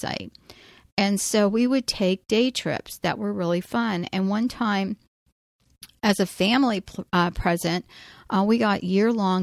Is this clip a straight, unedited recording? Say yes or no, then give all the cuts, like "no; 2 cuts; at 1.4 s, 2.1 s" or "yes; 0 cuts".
yes; 0 cuts